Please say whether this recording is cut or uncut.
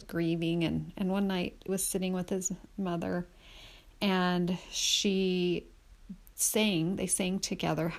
cut